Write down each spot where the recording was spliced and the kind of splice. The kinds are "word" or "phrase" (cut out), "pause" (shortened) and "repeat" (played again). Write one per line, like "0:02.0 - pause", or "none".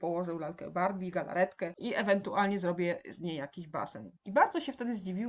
0:01.1 - word
0:04.2 - pause